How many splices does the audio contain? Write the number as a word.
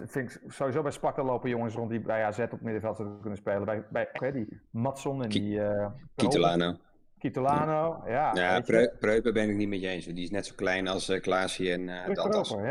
one